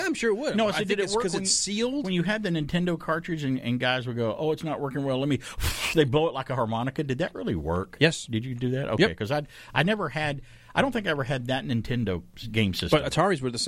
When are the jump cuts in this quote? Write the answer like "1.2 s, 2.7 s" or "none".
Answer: none